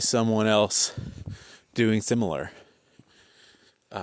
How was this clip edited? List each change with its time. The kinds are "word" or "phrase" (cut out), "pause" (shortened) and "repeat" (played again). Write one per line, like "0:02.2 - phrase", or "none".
0:02.0 - word